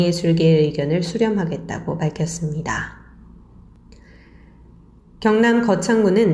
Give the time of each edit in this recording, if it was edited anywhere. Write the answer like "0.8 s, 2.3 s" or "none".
none